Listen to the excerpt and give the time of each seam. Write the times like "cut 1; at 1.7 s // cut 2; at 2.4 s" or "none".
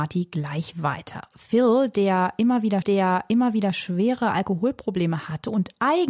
cut 1; at 2.8 s